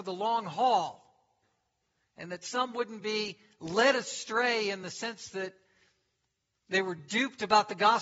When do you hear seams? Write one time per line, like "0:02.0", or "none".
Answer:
none